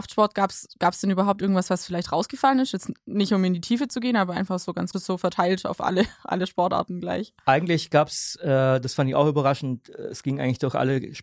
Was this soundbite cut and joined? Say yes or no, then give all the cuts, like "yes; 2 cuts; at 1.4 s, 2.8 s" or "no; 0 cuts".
yes; 1 cut; at 4.9 s